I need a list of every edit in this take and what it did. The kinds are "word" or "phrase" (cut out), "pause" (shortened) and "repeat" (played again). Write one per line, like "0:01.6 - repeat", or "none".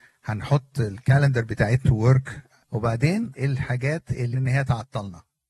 0:01.8 - word
0:02.6 - word
0:03.3 - word
0:04.3 - word

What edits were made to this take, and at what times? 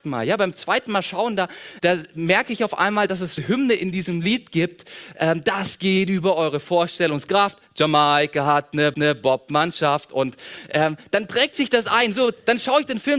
0:01.8 - word
0:03.4 - word
0:08.9 - repeat

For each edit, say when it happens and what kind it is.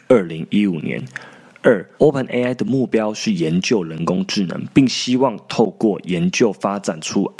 0:01.9 - pause

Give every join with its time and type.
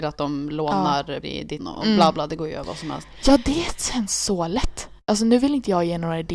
0:01.2 - word
0:01.6 - word

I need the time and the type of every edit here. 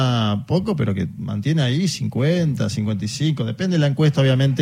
none

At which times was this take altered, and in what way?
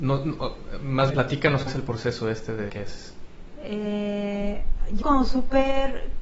0:01.1 - word
0:01.7 - word
0:02.7 - word
0:05.0 - word

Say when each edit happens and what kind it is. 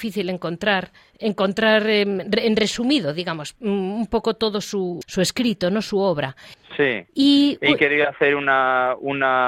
0:05.0 - word

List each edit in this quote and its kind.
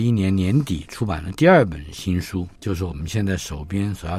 0:02.6 - pause

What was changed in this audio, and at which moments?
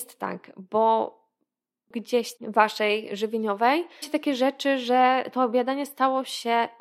0:02.4 - phrase
0:04.0 - word

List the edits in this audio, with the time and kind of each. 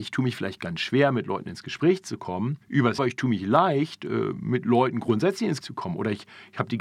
0:02.6 - pause
0:03.0 - phrase
0:05.6 - word

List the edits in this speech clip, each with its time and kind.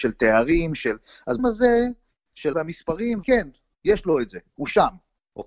0:01.4 - word
0:02.5 - word
0:03.2 - word

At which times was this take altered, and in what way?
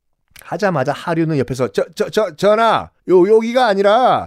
0:03.0 - pause

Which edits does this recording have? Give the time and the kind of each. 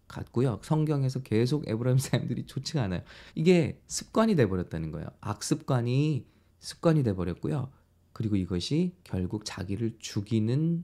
0:03.3 - pause
0:06.5 - pause

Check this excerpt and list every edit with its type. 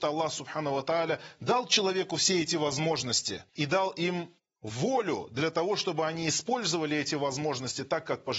0:03.5 - pause
0:04.4 - pause

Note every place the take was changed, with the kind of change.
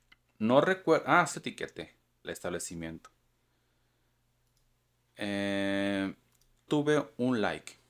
0:01.3 - word
0:02.2 - word
0:06.7 - word

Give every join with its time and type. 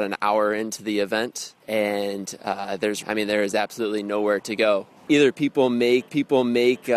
0:01.6 - pause
0:03.0 - word
0:05.0 - pause
0:06.1 - repeat

